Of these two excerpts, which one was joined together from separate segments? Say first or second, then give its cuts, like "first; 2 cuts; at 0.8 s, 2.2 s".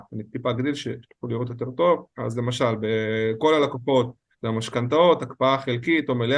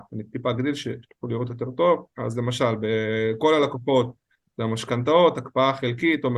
first; 1 cut; at 4.3 s